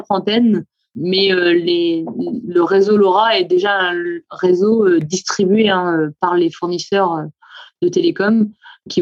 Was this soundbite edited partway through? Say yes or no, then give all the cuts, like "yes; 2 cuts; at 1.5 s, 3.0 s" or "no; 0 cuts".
no; 0 cuts